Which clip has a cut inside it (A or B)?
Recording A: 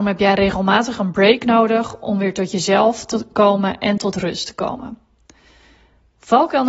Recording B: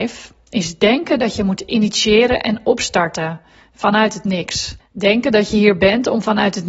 B